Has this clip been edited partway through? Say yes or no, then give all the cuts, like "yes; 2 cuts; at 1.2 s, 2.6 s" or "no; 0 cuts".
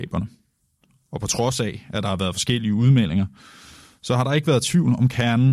no; 0 cuts